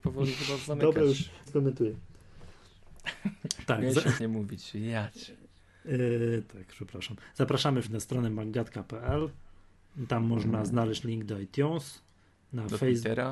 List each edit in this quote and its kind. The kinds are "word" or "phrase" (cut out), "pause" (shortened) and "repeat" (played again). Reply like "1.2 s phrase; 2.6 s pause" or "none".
1.5 s word; 4.2 s word; 6.5 s word; 7.8 s word; 11.0 s word